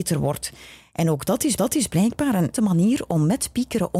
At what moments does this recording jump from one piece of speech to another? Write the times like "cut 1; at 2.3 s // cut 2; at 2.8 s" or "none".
cut 1; at 1.6 s // cut 2; at 2.5 s

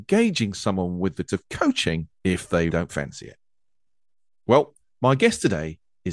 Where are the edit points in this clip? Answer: cut 1; at 1.3 s // cut 2; at 2.1 s // cut 3; at 2.7 s // cut 4; at 4.8 s

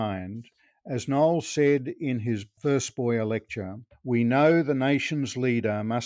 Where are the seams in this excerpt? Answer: cut 1; at 3.9 s

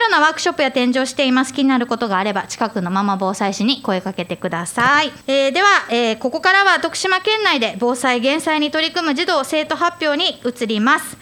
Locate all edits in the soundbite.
cut 1; at 5.2 s

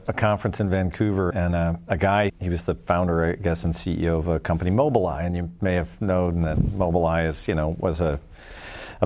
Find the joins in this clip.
cut 1; at 1.3 s // cut 2; at 2.3 s

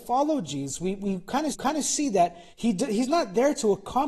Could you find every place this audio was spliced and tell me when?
cut 1; at 1.5 s // cut 2; at 2.5 s

